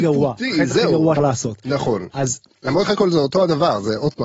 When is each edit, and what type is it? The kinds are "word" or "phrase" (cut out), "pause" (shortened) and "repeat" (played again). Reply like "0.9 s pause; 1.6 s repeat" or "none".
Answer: 1.2 s word; 2.8 s word